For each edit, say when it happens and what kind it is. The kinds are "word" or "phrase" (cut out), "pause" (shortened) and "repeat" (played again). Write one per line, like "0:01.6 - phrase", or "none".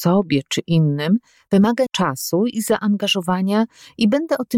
0:01.9 - word